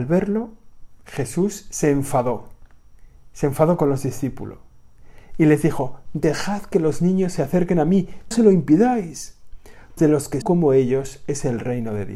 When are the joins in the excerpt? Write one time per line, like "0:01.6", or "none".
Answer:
0:08.3
0:10.0
0:10.4